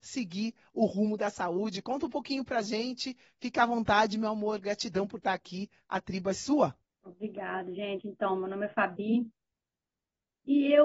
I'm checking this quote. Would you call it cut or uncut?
cut